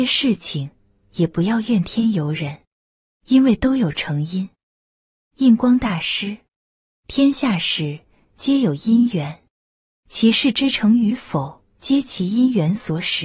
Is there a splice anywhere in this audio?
yes; 1 cut; at 11.7 s

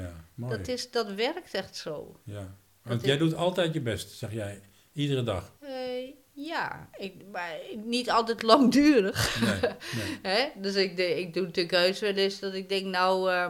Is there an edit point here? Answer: yes; 1 cut; at 5.6 s

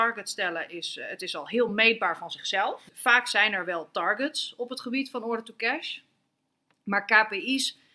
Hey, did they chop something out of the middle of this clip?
no; 0 cuts

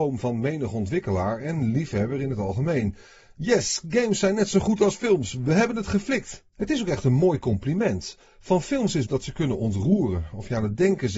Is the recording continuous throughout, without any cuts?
no; 2 cuts; at 6.5 s, 9.1 s

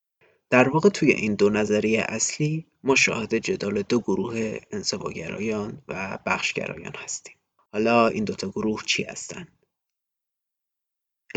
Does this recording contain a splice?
no; 0 cuts

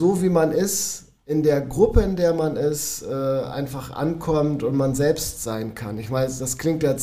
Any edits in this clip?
no; 0 cuts

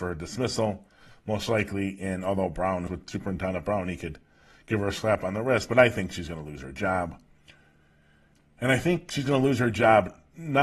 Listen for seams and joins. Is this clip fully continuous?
no; 1 cut; at 2.9 s

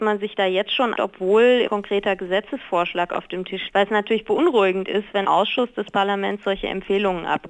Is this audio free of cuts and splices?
no; 4 cuts; at 0.9 s, 1.7 s, 3.7 s, 5.2 s

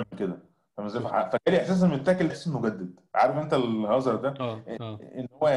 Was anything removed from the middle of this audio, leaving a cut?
yes; 1 cut; at 2.3 s

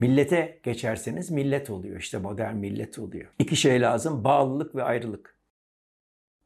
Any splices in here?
yes; 1 cut; at 3.3 s

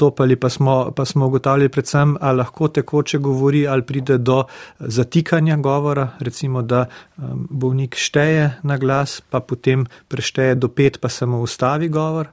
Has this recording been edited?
no; 0 cuts

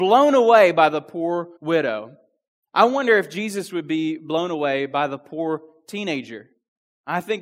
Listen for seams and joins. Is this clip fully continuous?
no; 1 cut; at 1.6 s

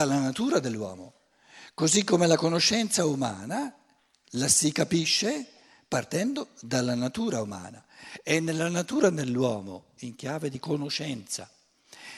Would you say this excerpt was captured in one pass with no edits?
yes; 0 cuts

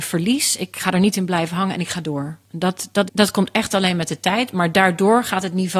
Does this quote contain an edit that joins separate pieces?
yes; 2 cuts; at 2.4 s, 3.1 s

